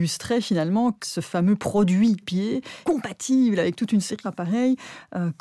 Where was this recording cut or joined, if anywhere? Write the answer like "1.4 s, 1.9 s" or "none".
1.0 s, 2.2 s, 2.8 s, 4.2 s